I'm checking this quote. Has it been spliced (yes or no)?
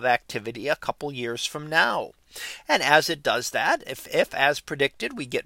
no